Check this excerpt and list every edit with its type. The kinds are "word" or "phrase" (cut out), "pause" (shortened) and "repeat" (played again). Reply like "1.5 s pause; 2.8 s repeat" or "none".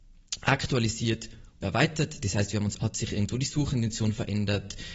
1.6 s word; 2.8 s word